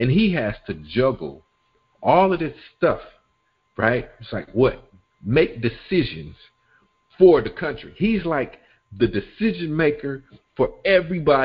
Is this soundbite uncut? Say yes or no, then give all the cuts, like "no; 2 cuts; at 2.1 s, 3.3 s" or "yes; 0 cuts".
yes; 0 cuts